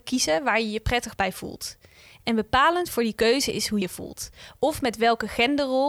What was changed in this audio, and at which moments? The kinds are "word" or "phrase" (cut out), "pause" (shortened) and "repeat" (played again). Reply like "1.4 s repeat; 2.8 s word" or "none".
3.8 s word